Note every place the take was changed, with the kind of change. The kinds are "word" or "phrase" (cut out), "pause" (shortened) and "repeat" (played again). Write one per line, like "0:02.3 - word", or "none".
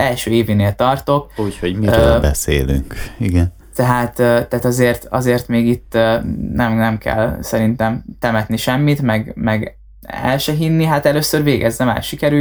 0:03.6 - pause